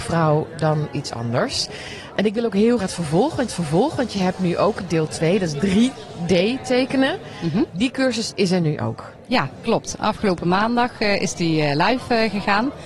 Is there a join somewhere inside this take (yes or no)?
yes